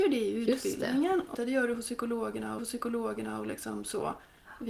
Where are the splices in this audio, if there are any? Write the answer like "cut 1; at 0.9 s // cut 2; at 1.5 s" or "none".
cut 1; at 1.3 s // cut 2; at 2.6 s